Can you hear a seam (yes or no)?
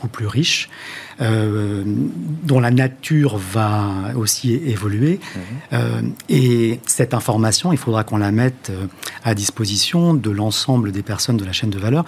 no